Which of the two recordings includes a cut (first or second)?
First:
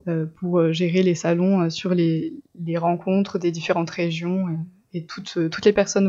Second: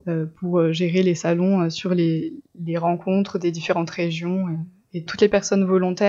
second